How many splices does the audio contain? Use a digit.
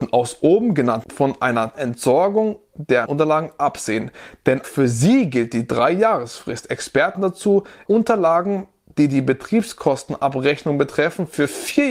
6